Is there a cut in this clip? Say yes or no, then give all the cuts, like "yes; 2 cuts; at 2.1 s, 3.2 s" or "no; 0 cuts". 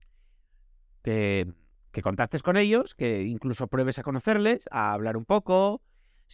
no; 0 cuts